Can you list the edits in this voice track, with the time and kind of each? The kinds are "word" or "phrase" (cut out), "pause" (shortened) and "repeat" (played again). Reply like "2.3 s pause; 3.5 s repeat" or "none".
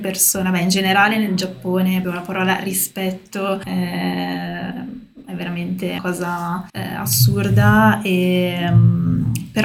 2.0 s word; 3.6 s word; 6.0 s word; 6.7 s pause